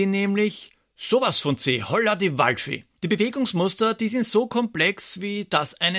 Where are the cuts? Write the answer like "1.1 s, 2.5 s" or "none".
3.0 s